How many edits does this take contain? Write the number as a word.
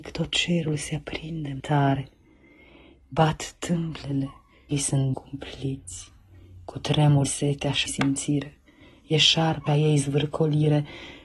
six